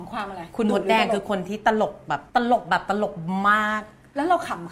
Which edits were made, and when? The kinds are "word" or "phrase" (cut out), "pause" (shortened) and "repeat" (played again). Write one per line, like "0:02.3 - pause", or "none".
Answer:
0:02.3 - pause